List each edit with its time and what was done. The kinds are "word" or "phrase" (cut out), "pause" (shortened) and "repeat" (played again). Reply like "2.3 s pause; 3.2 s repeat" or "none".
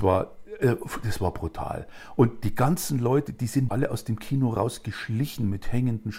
3.7 s word